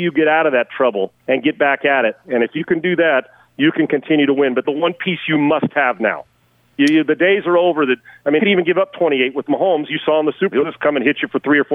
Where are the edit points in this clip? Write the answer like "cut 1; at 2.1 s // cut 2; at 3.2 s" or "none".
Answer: cut 1; at 1.2 s // cut 2; at 4.6 s // cut 3; at 8.4 s // cut 4; at 10.5 s